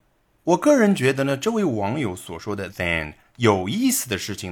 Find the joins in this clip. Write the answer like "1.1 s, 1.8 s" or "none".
2.7 s